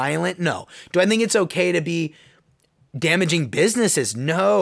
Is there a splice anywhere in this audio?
no; 0 cuts

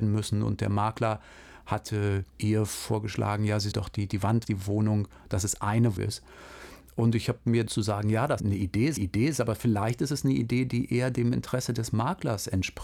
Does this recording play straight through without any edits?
no; 7 cuts; at 2.3 s, 3.7 s, 4.4 s, 6.0 s, 7.7 s, 8.4 s, 9.0 s

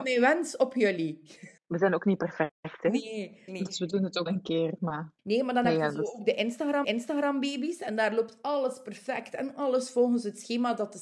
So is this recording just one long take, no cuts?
no; 5 cuts; at 1.6 s, 3.5 s, 4.3 s, 5.2 s, 6.8 s

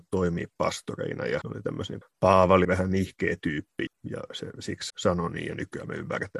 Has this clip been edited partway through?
yes; 5 cuts; at 1.4 s, 2.0 s, 2.6 s, 3.9 s, 4.9 s

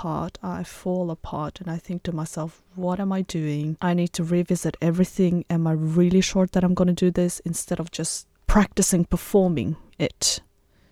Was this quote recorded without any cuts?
no; 1 cut; at 3.8 s

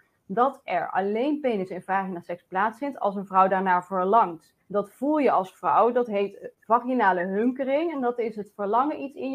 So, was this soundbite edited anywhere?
yes; 1 cut; at 4.6 s

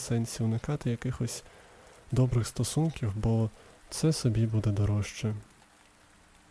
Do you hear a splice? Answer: no; 0 cuts

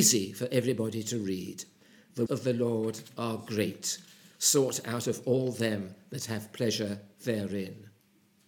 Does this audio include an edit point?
yes; 1 cut; at 2.3 s

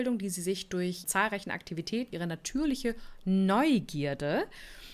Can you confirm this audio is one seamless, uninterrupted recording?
no; 2 cuts; at 1.0 s, 2.1 s

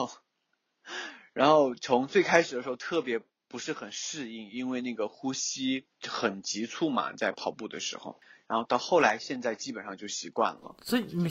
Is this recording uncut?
yes; 0 cuts

